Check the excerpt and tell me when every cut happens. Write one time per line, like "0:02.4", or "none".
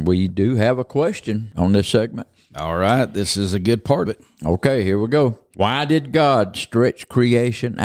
0:04.1